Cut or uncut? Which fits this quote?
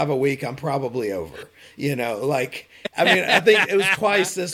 uncut